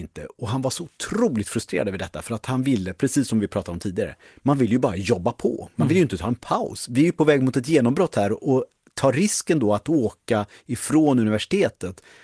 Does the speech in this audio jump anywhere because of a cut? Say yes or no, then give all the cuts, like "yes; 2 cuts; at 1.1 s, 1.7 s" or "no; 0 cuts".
no; 0 cuts